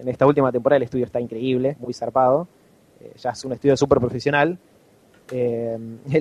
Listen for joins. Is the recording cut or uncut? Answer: cut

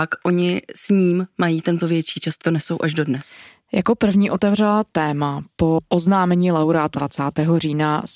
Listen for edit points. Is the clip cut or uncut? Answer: cut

